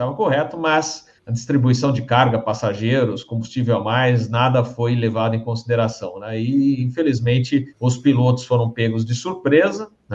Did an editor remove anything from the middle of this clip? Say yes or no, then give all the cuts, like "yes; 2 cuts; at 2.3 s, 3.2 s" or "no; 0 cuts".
yes; 2 cuts; at 1.2 s, 7.7 s